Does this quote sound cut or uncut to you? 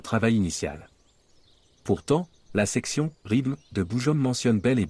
uncut